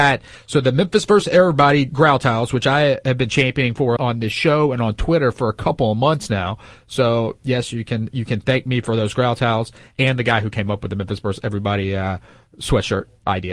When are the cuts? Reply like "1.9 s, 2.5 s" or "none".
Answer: 4.0 s